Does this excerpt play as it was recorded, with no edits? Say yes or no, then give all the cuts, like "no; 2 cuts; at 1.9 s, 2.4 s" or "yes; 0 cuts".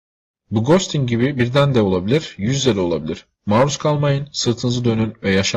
no; 1 cut; at 3.3 s